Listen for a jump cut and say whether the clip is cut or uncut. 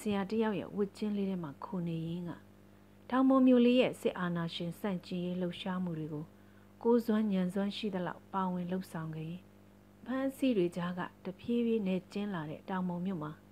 uncut